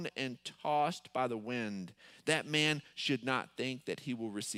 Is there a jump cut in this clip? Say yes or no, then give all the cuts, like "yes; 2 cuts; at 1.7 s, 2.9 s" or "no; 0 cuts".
no; 0 cuts